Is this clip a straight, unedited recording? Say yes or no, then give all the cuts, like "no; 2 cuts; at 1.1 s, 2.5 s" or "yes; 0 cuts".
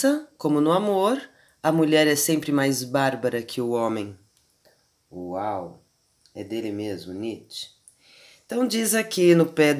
yes; 0 cuts